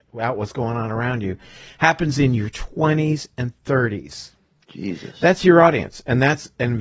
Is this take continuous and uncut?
yes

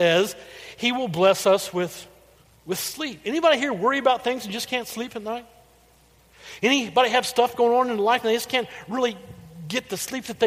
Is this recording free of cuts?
no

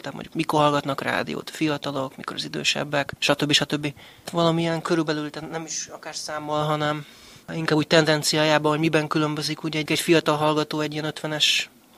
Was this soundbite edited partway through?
yes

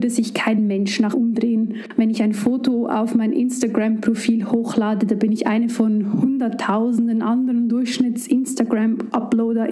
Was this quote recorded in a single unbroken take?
no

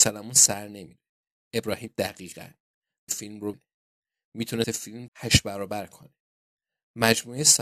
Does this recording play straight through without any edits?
no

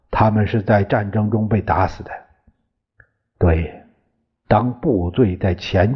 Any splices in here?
no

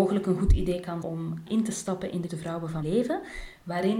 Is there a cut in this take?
yes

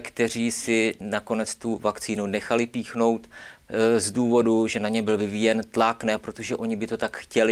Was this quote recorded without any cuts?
yes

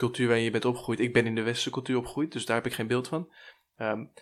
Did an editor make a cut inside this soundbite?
no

